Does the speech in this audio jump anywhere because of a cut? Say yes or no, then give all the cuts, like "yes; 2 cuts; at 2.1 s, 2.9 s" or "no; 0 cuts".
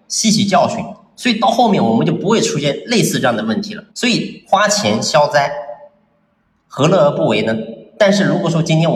yes; 1 cut; at 3.9 s